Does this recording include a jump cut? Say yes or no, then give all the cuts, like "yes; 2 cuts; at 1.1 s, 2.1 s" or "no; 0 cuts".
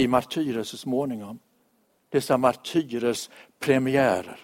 no; 0 cuts